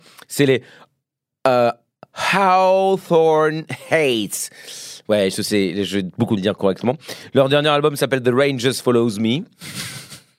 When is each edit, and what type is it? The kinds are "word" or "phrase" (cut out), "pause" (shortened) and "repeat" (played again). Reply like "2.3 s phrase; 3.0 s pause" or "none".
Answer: 6.4 s phrase